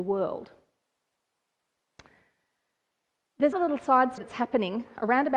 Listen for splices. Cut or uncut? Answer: cut